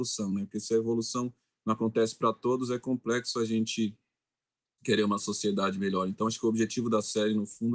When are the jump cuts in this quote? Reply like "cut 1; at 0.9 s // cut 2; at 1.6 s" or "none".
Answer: none